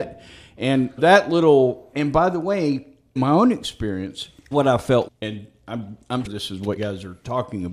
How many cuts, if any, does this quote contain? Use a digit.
7